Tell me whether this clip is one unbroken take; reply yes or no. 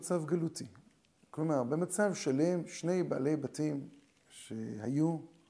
yes